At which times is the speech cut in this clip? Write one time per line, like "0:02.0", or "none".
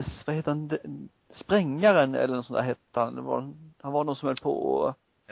0:03.7